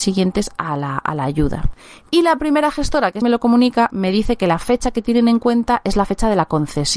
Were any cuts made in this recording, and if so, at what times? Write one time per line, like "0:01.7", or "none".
0:03.2